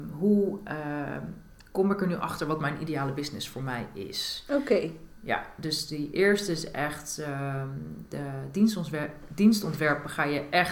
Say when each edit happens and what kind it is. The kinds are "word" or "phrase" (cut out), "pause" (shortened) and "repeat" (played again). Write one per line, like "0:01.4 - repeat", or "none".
none

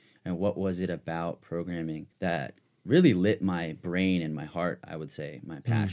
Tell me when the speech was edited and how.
0:02.1 - pause

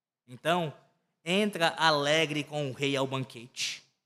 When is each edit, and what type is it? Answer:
none

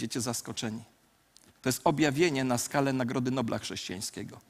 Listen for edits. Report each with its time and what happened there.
none

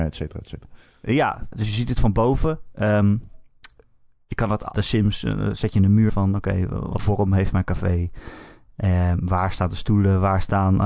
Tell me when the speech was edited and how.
0:01.5 - word
0:04.7 - word
0:06.1 - word
0:07.0 - word

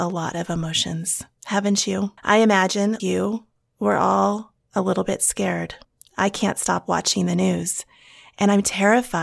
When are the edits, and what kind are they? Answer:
0:02.2 - pause
0:03.0 - word
0:05.8 - pause

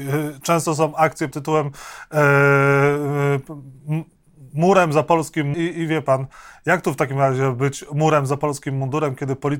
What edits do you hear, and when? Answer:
0:01.3 - word
0:05.5 - word

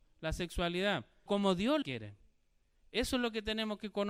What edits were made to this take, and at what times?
0:01.3 - word
0:01.8 - word

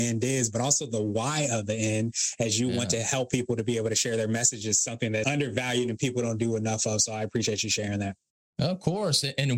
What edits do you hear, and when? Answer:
0:05.2 - word

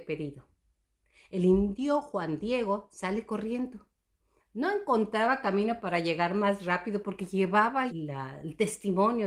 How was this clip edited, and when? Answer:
0:07.9 - phrase

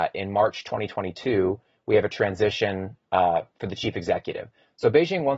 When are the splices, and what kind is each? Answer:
none

